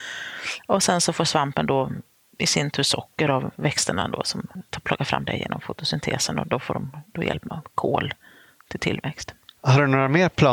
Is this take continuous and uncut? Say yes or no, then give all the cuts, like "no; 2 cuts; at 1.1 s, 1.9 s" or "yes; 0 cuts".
yes; 0 cuts